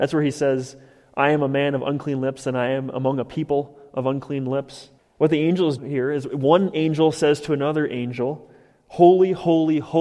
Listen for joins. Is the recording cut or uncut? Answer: cut